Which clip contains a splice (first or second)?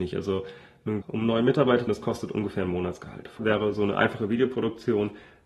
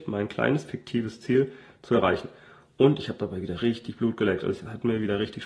first